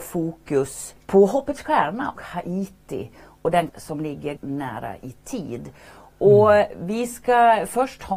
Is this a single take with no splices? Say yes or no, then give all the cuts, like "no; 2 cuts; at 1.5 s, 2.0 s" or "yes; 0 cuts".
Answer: no; 4 cuts; at 1.0 s, 2.2 s, 3.7 s, 4.4 s